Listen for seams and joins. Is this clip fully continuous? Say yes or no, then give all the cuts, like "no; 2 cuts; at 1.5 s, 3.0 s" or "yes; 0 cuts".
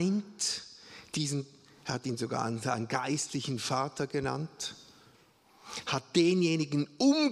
yes; 0 cuts